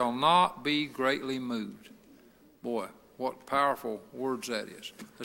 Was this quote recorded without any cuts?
yes; 0 cuts

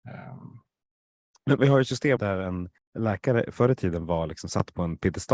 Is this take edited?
yes; 3 cuts; at 1.6 s, 2.2 s, 2.8 s

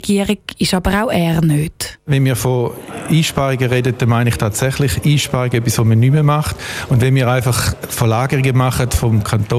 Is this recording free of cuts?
yes; 0 cuts

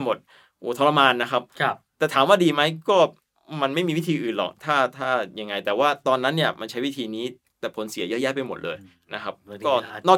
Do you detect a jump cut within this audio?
no; 0 cuts

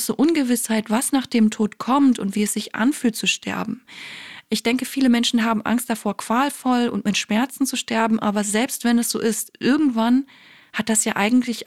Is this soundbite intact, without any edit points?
yes; 0 cuts

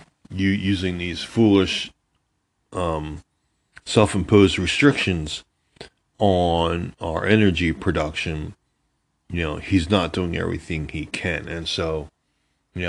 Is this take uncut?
yes; 0 cuts

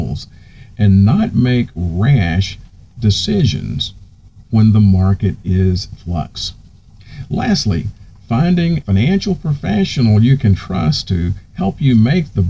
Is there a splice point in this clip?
yes; 2 cuts; at 5.9 s, 8.8 s

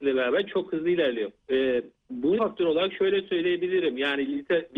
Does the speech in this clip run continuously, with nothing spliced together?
no; 2 cuts; at 1.4 s, 2.4 s

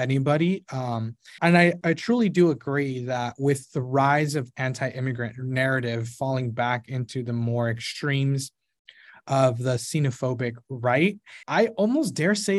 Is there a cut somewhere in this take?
yes; 3 cuts; at 1.4 s, 1.8 s, 11.4 s

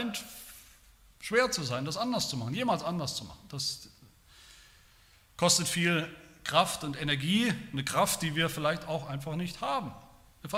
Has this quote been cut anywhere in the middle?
no; 0 cuts

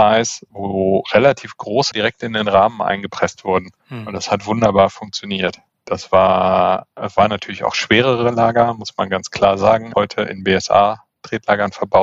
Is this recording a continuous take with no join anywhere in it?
no; 4 cuts; at 1.9 s, 3.8 s, 6.9 s, 9.9 s

